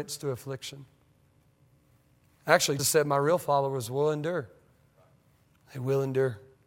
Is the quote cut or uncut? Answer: cut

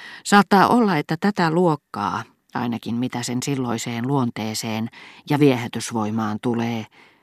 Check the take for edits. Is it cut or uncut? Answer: uncut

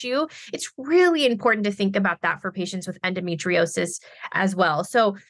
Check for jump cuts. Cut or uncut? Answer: uncut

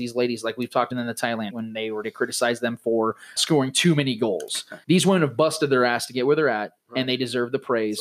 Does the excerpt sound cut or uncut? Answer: cut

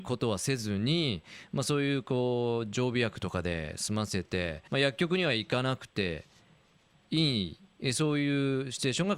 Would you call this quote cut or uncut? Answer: cut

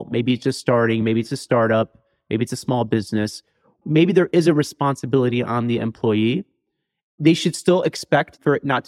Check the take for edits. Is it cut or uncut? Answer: uncut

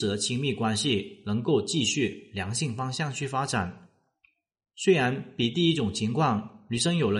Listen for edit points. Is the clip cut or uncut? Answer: uncut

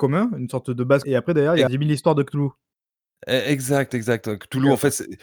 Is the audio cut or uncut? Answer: cut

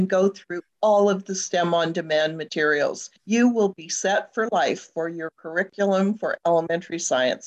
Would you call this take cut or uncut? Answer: cut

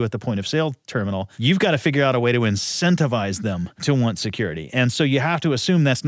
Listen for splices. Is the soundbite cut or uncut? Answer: uncut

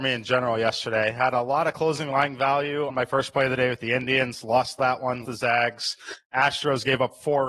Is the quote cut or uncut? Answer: cut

